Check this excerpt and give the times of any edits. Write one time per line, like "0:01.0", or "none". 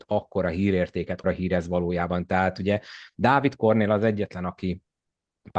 0:01.2